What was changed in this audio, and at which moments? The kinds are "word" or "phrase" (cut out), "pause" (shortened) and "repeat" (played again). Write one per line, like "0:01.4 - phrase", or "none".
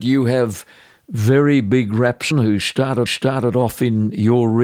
0:02.3 - word
0:03.1 - repeat